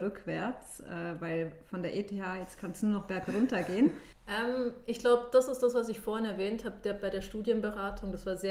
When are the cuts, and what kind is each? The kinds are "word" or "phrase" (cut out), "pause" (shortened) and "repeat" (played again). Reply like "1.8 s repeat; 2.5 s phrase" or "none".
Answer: none

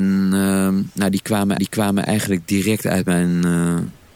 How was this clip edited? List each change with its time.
1.6 s repeat

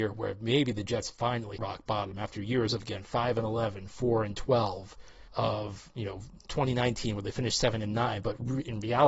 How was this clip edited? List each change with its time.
1.6 s word; 5.3 s pause

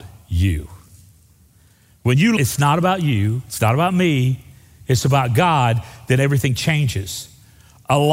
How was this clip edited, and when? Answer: 2.4 s word

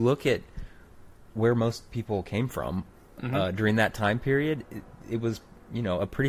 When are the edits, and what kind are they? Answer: none

